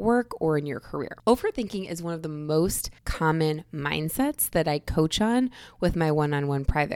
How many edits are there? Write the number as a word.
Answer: one